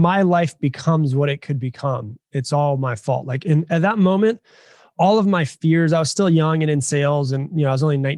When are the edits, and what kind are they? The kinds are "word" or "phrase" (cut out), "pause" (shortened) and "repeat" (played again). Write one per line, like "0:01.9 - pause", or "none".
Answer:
none